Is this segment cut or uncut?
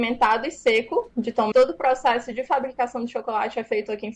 cut